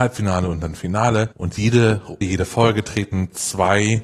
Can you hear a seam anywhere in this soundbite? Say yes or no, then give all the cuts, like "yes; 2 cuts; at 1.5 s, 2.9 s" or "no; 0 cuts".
yes; 2 cuts; at 1.3 s, 2.2 s